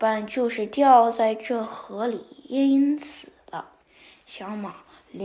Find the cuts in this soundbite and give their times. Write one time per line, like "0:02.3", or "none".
0:03.8